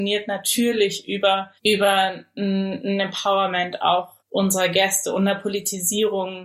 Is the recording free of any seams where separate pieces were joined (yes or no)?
no